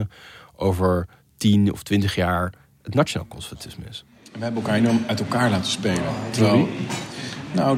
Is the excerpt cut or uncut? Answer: uncut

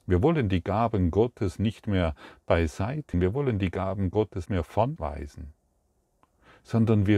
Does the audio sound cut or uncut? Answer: cut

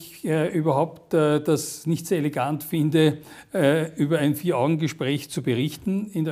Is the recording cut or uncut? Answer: uncut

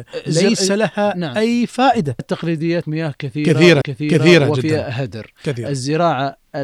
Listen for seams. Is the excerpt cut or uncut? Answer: cut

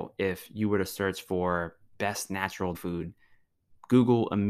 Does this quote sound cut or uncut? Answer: cut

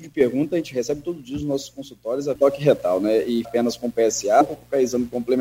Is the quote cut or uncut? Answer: cut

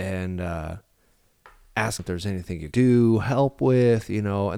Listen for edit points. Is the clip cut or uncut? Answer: cut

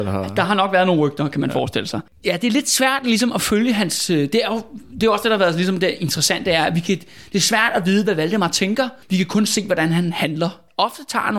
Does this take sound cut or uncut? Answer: cut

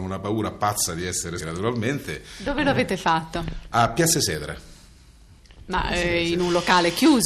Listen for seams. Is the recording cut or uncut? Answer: cut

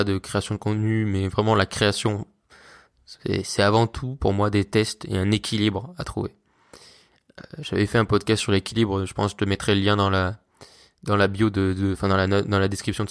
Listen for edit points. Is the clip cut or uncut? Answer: uncut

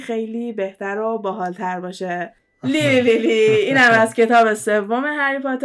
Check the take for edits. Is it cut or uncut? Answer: uncut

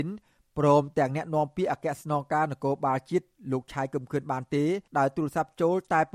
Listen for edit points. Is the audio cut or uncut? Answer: cut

